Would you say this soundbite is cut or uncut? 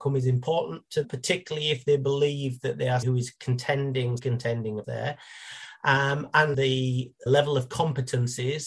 cut